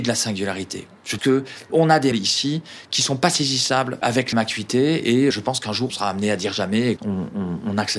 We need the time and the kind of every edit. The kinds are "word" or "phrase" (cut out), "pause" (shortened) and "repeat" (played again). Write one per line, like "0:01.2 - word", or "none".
0:01.2 - word
0:01.7 - word
0:02.1 - word
0:04.0 - word
0:04.3 - word
0:05.3 - word
0:05.9 - word
0:07.0 - word